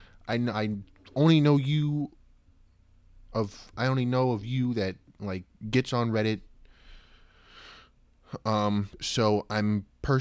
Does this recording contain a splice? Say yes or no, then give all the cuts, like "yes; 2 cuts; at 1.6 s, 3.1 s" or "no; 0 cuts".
no; 0 cuts